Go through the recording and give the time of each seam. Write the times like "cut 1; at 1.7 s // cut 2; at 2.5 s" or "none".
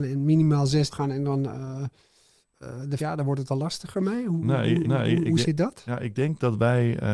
cut 1; at 0.9 s // cut 2; at 3.0 s // cut 3; at 4.8 s